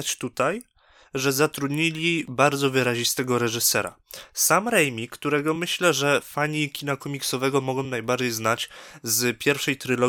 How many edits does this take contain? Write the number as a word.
zero